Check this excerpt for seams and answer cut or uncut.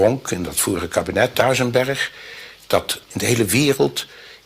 cut